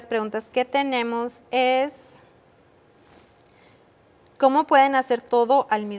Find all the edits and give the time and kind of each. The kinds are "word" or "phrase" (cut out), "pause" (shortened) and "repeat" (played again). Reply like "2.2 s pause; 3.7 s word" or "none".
none